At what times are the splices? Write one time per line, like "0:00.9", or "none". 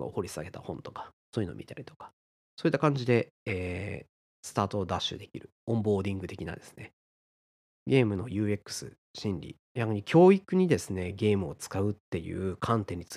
0:09.6